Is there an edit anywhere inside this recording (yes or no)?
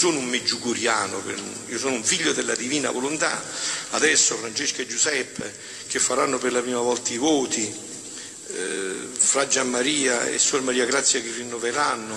no